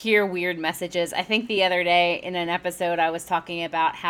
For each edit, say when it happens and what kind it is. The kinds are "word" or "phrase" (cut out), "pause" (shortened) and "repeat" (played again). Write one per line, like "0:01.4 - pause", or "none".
none

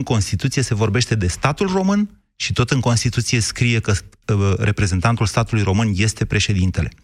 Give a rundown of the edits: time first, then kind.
none

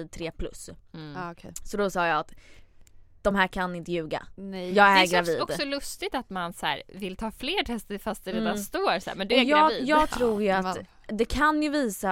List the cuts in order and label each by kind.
none

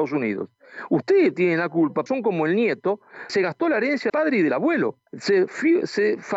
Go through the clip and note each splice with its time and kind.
0:02.1 - word
0:03.3 - word
0:04.1 - word
0:05.1 - pause

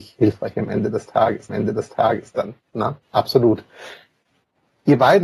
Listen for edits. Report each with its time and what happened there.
0:01.5 - repeat
0:03.0 - pause

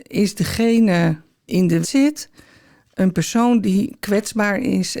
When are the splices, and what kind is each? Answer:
0:01.5 - word
0:01.8 - word

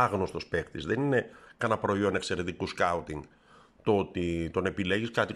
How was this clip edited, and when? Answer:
none

